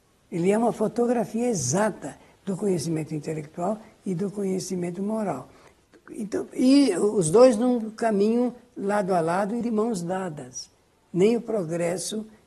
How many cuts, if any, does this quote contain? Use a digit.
1